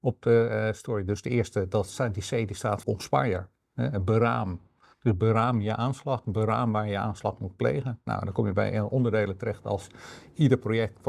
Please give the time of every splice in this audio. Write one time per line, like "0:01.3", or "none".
0:02.8